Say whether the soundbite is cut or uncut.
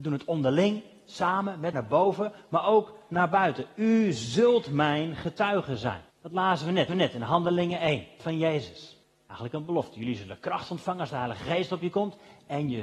cut